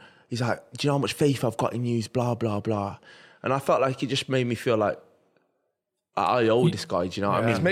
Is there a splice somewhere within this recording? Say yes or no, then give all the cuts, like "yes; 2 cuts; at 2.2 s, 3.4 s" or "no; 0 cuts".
no; 0 cuts